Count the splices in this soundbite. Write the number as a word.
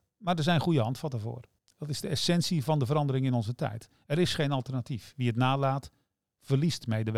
one